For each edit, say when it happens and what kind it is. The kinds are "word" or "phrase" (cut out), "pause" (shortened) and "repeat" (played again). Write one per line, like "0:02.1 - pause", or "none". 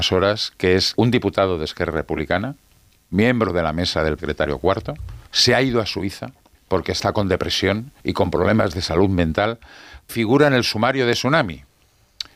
0:00.9 - word
0:04.2 - word
0:05.3 - pause
0:06.5 - pause
0:08.0 - pause
0:10.1 - word